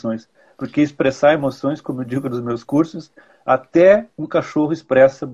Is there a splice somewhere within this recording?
no; 0 cuts

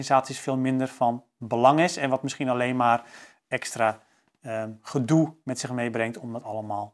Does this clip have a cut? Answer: no; 0 cuts

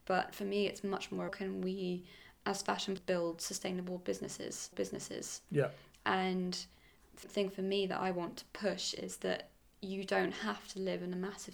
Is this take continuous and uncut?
no; 4 cuts; at 1.3 s, 3.0 s, 4.7 s, 7.2 s

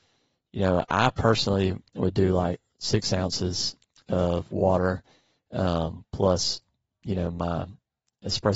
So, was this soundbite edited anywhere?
no; 0 cuts

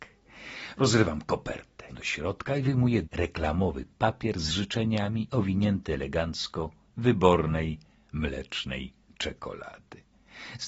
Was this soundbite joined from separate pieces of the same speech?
yes; 4 cuts; at 1.9 s, 3.0 s, 5.3 s, 6.9 s

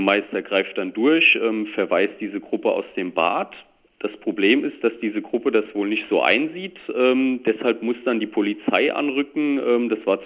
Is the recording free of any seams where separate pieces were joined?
yes; 0 cuts

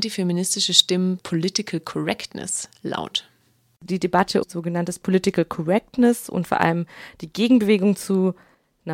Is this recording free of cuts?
no; 2 cuts; at 1.2 s, 4.4 s

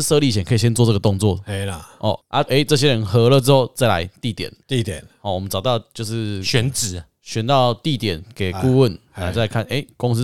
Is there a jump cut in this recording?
yes; 1 cut; at 2.5 s

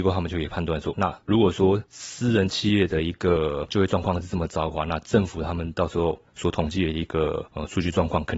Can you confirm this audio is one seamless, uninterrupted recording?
no; 1 cut; at 0.9 s

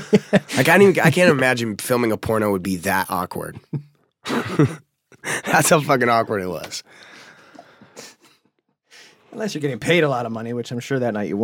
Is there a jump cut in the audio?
no; 0 cuts

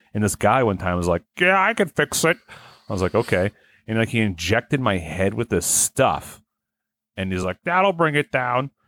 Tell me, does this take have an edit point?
no; 0 cuts

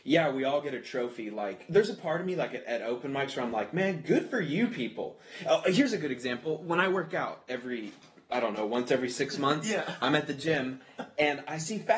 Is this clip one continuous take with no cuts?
yes; 0 cuts

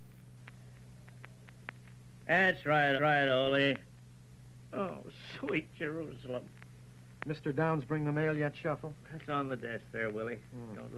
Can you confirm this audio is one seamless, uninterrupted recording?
no; 1 cut; at 3.0 s

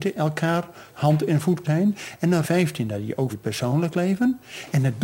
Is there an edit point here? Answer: yes; 4 cuts; at 0.9 s, 1.6 s, 2.4 s, 3.3 s

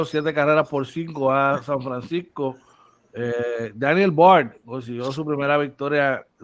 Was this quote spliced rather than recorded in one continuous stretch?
no; 0 cuts

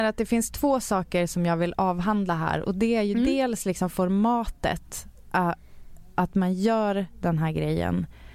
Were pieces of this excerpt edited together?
no; 0 cuts

